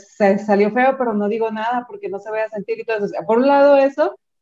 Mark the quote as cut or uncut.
uncut